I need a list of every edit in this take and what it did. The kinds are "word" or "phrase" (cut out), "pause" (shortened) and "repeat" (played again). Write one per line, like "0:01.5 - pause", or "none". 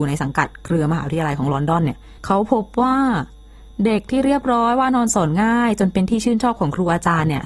0:02.2 - pause